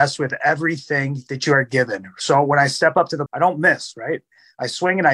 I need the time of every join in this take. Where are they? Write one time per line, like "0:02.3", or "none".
0:03.3